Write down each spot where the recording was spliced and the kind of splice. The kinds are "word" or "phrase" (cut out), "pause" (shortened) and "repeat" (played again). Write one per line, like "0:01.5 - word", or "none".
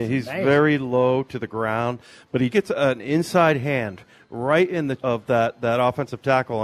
0:02.5 - word
0:05.0 - word

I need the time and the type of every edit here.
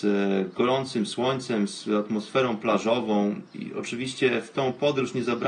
none

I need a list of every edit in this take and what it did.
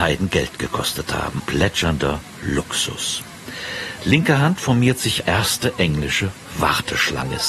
0:01.4 - word
0:05.2 - word

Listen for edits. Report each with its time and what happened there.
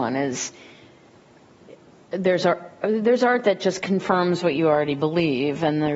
none

